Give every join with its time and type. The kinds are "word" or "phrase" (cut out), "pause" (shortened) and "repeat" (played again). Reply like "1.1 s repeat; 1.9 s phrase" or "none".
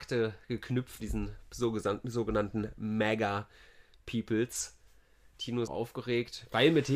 1.0 s word; 5.7 s word